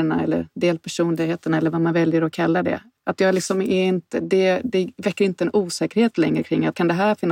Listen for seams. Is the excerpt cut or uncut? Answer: uncut